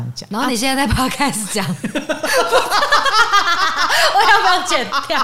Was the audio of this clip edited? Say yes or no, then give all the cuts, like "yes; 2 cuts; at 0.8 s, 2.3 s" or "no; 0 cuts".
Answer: no; 0 cuts